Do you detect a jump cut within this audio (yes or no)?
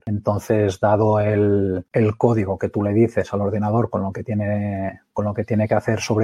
no